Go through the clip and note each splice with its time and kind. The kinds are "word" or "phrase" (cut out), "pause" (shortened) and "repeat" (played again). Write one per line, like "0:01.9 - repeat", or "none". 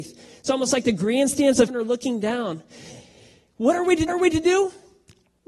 0:01.7 - word
0:04.1 - repeat

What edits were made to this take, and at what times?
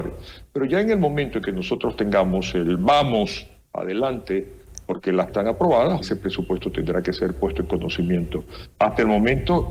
0:05.3 - word
0:06.0 - word

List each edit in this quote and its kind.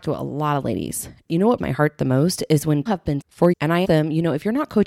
0:01.3 - word
0:01.6 - word
0:02.9 - word
0:03.2 - word
0:03.5 - word
0:03.8 - word

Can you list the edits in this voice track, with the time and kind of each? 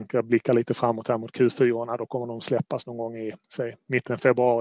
0:03.4 - pause

